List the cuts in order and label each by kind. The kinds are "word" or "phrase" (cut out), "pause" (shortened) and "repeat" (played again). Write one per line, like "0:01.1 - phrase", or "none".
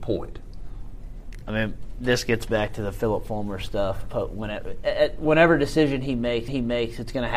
0:06.5 - repeat